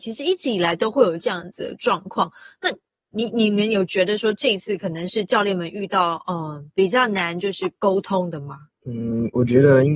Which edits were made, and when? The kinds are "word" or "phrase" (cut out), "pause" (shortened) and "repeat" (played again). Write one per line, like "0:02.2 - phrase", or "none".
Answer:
none